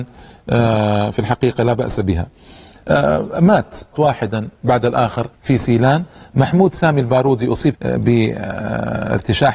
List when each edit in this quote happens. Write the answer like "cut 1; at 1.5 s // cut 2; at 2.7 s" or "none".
cut 1; at 3.9 s // cut 2; at 5.3 s // cut 3; at 7.7 s